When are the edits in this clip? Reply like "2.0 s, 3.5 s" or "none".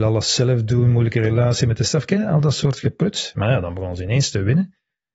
2.2 s